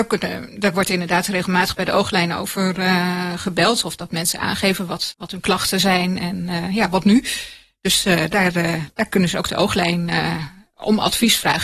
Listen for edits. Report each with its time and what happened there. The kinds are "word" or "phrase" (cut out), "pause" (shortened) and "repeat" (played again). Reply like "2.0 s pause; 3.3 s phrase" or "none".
5.1 s word